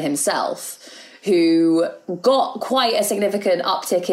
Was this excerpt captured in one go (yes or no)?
yes